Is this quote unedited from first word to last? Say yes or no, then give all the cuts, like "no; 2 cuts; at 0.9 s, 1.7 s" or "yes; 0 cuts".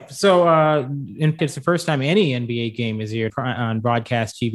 no; 2 cuts; at 1.4 s, 3.3 s